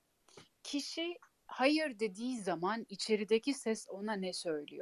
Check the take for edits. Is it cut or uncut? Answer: uncut